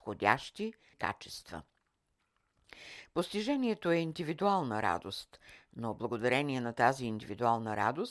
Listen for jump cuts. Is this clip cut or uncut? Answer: cut